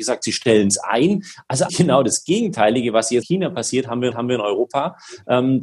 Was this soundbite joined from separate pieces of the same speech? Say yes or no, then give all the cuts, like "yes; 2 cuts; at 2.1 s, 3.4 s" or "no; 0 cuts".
yes; 3 cuts; at 1.7 s, 3.2 s, 4.1 s